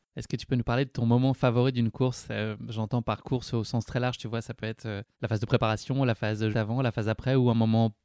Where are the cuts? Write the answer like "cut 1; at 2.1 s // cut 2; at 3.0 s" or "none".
cut 1; at 5.1 s // cut 2; at 6.5 s